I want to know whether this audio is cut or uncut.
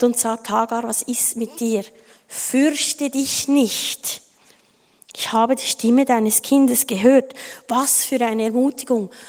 uncut